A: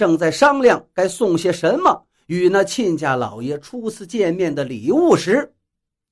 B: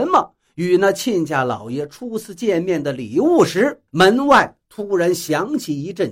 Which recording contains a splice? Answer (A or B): B